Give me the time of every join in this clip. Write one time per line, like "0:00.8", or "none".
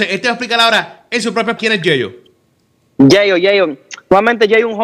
0:01.6